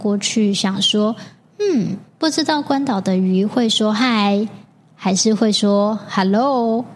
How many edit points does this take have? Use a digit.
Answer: 0